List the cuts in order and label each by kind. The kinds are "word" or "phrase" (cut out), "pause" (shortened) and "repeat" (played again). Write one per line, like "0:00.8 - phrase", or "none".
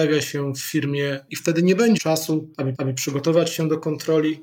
0:01.3 - word
0:02.0 - word
0:02.7 - repeat